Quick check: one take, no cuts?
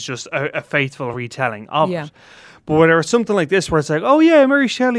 yes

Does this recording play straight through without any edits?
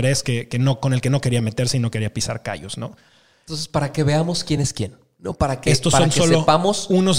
yes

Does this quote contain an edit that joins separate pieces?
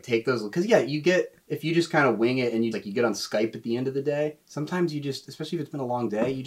yes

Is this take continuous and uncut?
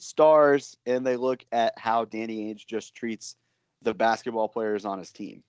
yes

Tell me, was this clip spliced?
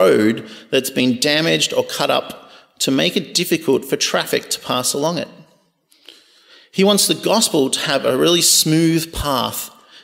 no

